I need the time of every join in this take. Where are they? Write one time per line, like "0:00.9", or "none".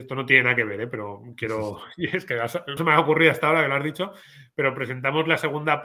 0:02.8

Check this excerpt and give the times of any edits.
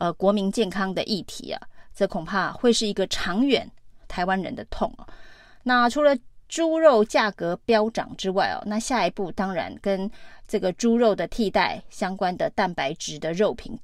none

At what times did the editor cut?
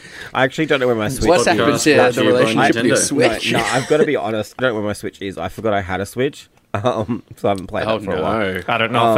0:04.6

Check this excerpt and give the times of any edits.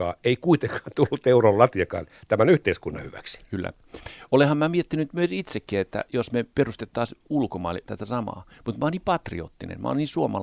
0:06.5
0:07.9

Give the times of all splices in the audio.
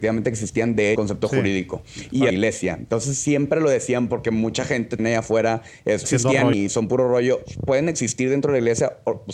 0:00.9
0:02.3
0:05.0
0:06.0
0:06.5

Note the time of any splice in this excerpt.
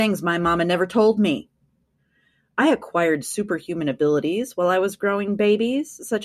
none

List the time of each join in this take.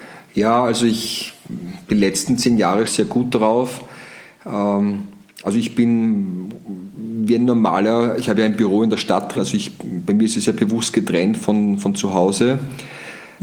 0:02.8
0:09.3

